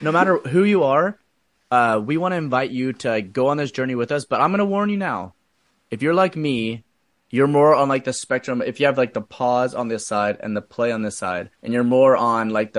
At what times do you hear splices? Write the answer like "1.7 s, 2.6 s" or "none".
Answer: 11.5 s